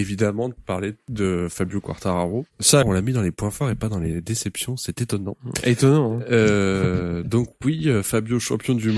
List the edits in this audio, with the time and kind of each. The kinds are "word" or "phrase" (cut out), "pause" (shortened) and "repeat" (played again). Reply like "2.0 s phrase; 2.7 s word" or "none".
2.8 s word